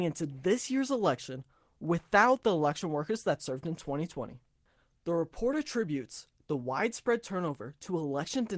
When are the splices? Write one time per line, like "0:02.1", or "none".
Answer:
none